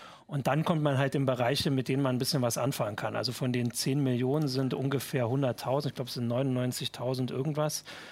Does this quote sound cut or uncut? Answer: uncut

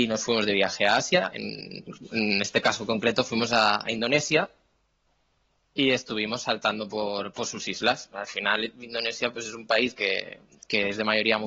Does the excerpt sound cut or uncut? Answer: uncut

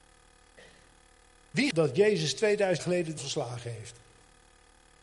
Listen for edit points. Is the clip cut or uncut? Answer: cut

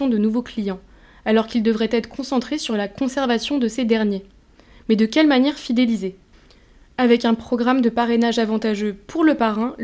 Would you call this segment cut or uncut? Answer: uncut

